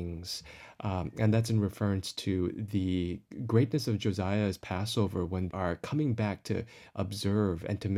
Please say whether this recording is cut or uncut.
cut